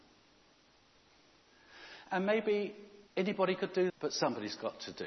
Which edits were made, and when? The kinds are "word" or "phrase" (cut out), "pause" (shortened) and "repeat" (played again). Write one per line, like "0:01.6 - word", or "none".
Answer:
0:03.1 - pause
0:03.9 - word